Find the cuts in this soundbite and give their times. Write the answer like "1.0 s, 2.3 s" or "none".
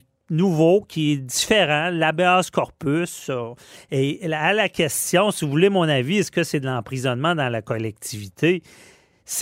none